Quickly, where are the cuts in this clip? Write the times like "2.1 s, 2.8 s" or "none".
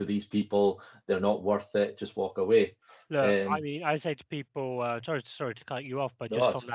2.9 s